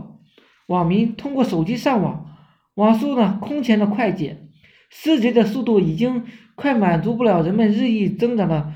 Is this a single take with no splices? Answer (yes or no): yes